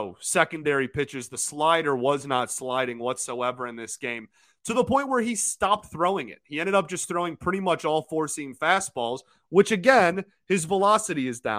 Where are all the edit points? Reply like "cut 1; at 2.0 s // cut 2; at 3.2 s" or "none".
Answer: none